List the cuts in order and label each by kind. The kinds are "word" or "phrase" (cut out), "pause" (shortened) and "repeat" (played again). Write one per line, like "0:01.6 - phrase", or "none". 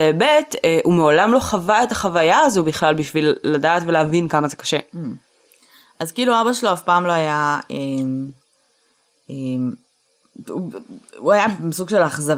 none